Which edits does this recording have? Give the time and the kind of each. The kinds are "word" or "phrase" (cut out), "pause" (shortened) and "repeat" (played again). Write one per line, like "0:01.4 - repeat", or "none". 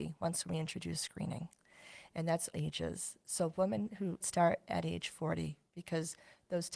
0:02.5 - word
0:04.2 - word